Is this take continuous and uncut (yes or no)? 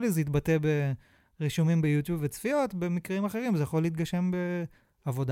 yes